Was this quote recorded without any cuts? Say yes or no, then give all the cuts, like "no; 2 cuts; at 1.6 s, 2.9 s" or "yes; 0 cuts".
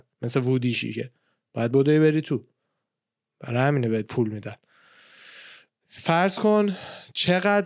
yes; 0 cuts